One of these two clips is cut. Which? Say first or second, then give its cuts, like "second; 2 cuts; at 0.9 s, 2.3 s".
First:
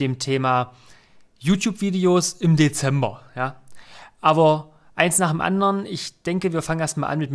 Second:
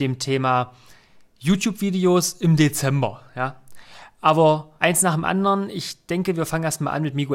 second; 1 cut; at 4.8 s